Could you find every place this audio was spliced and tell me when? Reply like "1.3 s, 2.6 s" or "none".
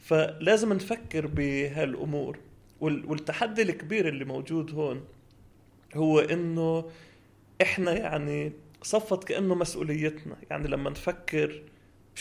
none